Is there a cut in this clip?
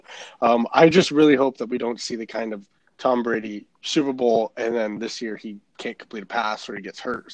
no; 0 cuts

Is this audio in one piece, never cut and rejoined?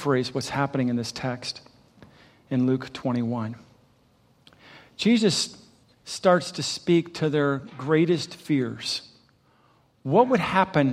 yes; 0 cuts

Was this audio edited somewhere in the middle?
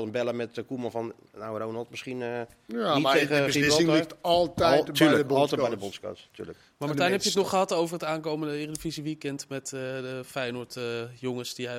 no; 0 cuts

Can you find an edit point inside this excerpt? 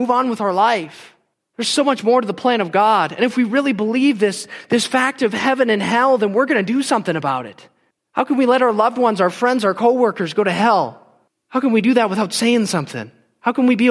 no; 0 cuts

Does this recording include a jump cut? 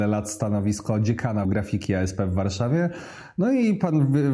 yes; 1 cut; at 1.4 s

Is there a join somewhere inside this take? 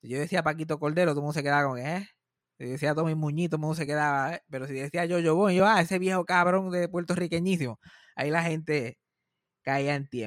no; 0 cuts

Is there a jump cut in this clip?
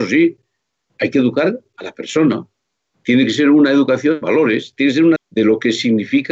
yes; 2 cuts; at 4.2 s, 5.2 s

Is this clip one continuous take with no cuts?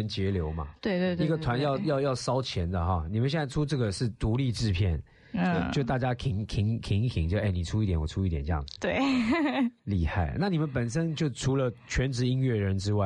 yes; 0 cuts

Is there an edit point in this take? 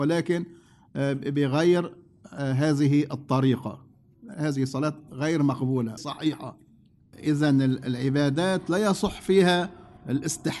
yes; 2 cuts; at 4.3 s, 6.0 s

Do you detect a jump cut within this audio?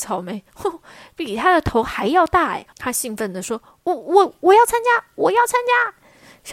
yes; 1 cut; at 2.7 s

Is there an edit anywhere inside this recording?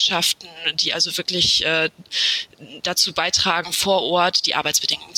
no; 0 cuts

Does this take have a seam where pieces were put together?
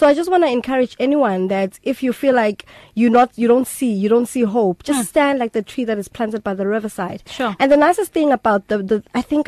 no; 0 cuts

